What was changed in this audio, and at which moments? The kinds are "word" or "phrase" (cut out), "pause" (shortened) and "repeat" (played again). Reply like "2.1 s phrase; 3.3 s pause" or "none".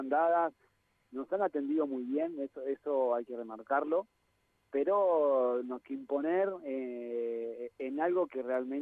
5.8 s word